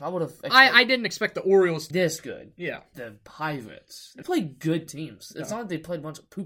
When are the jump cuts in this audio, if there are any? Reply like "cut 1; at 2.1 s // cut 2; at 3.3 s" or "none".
cut 1; at 1.9 s // cut 2; at 2.9 s // cut 3; at 4.2 s